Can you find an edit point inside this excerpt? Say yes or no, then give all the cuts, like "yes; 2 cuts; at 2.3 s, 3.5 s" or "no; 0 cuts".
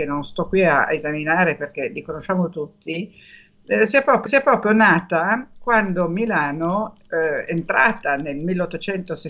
yes; 1 cut; at 4.3 s